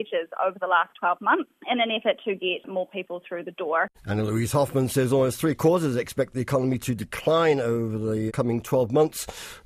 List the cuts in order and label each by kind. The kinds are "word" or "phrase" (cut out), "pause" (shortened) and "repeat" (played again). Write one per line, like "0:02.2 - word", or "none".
0:01.6 - pause
0:03.9 - pause
0:08.3 - word